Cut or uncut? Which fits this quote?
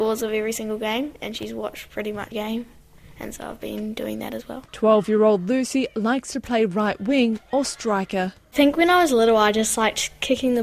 cut